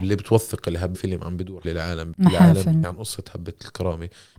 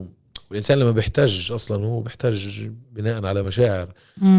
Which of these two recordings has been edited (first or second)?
first